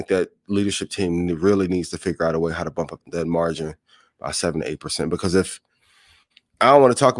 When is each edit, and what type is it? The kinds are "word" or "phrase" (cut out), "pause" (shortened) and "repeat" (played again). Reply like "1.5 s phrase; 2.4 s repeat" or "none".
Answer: 3.0 s word